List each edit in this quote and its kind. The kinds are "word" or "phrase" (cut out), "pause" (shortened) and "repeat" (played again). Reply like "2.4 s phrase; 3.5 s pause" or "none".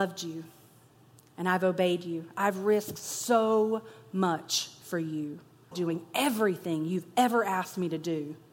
5.7 s word